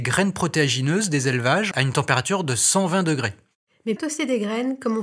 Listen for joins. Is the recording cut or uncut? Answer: cut